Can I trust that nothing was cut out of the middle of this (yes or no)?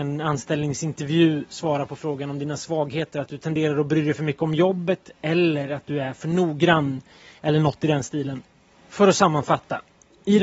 yes